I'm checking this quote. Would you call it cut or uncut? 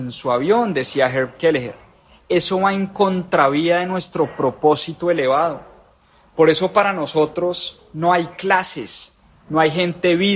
uncut